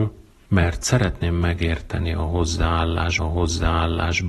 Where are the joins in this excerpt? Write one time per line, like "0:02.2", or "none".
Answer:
0:03.2